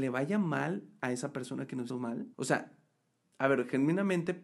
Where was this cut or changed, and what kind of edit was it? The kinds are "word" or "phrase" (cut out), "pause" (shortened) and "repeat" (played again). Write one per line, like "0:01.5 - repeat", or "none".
0:01.9 - word
0:02.3 - pause